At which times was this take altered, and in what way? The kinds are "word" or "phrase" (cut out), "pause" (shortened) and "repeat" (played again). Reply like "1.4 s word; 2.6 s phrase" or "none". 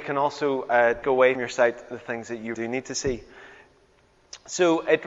1.0 s word; 1.4 s word; 2.5 s word